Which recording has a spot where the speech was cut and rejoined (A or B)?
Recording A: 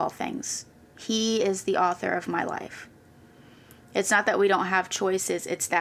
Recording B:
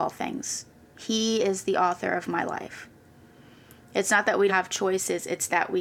B